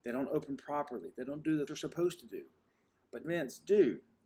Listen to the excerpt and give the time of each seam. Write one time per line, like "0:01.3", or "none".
0:01.7
0:03.2